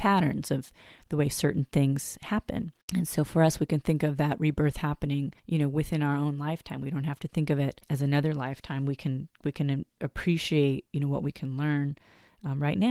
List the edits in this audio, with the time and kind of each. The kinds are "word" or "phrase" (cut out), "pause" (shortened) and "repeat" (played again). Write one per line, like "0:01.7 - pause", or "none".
0:02.8 - pause
0:05.4 - pause
0:07.8 - pause

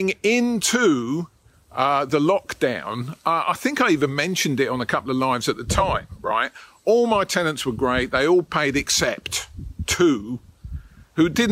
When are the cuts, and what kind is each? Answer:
none

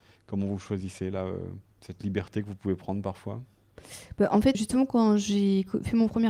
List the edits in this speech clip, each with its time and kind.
0:01.7 - pause
0:04.5 - word

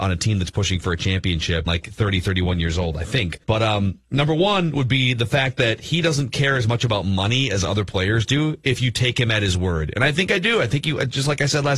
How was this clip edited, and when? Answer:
0:01.7 - word
0:03.4 - pause

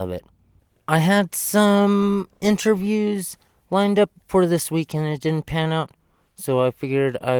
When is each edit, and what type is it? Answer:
none

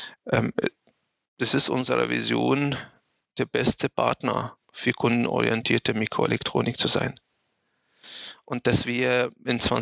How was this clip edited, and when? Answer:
0:04.6 - pause

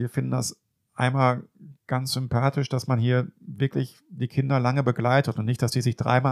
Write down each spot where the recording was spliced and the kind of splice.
none

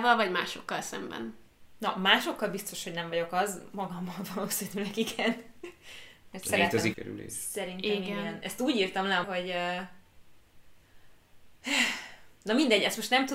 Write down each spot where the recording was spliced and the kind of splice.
0:06.9 - phrase
0:09.2 - word

